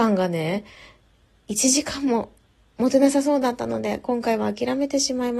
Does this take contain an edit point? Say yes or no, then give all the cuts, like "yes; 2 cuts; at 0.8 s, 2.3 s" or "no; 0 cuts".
no; 0 cuts